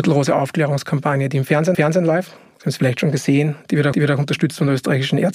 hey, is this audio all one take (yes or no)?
no